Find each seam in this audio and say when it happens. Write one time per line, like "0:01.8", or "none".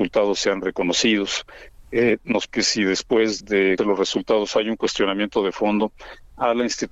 0:02.5
0:03.4
0:03.8